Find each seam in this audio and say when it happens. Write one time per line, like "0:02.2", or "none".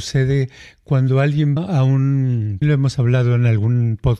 0:01.6
0:02.6